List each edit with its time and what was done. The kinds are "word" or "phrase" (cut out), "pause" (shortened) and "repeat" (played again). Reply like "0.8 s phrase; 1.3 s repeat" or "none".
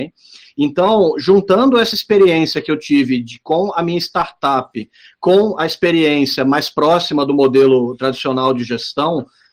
none